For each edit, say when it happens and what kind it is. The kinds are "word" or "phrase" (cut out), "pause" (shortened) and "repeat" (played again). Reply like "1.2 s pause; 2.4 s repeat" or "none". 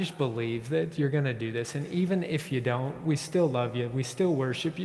none